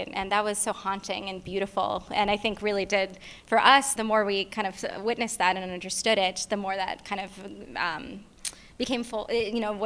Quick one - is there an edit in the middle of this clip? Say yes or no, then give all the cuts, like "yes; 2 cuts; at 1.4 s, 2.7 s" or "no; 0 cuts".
yes; 1 cut; at 4.0 s